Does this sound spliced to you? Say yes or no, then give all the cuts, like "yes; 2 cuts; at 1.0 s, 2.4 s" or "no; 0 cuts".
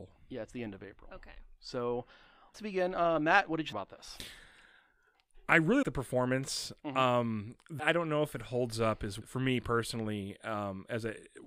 yes; 5 cuts; at 2.5 s, 3.7 s, 5.8 s, 7.8 s, 9.2 s